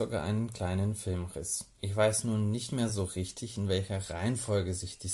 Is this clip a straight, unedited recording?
yes; 0 cuts

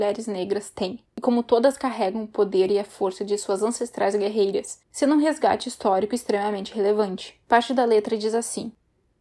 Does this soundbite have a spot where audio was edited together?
yes; 3 cuts; at 1.1 s, 4.8 s, 7.4 s

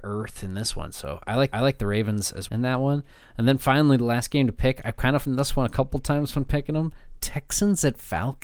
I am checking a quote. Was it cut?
yes; 3 cuts; at 1.5 s, 2.5 s, 5.2 s

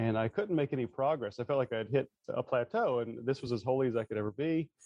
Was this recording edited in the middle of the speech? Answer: no; 0 cuts

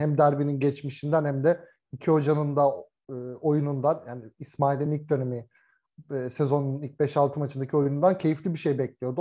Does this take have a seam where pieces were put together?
no; 0 cuts

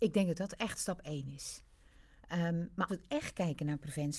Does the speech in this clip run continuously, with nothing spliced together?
no; 1 cut; at 2.9 s

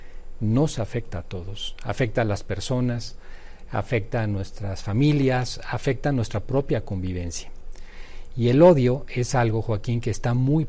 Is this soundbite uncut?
yes; 0 cuts

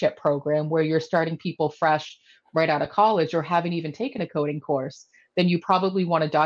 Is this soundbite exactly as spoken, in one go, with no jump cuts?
yes; 0 cuts

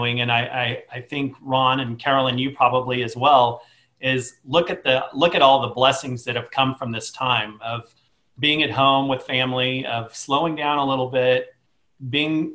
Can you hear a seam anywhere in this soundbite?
no; 0 cuts

